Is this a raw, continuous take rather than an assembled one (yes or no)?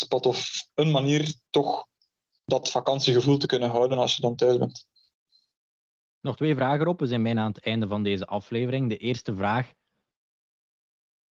yes